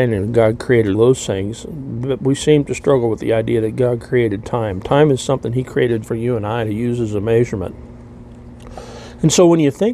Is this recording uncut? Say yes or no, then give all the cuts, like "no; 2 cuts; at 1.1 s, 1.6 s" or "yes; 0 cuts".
no; 2 cuts; at 0.9 s, 6.0 s